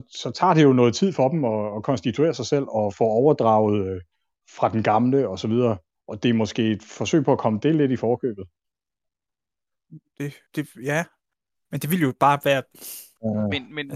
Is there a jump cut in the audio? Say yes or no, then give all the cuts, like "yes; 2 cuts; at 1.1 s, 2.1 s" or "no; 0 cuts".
yes; 2 cuts; at 6.0 s, 10.5 s